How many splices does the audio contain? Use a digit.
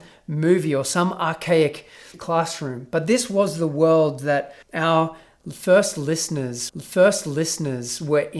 3